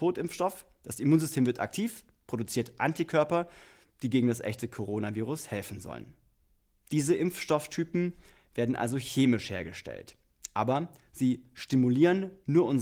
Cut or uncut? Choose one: uncut